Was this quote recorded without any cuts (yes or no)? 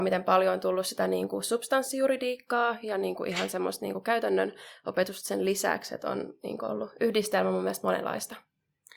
yes